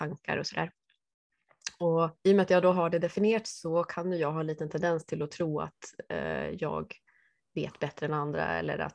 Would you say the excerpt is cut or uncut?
cut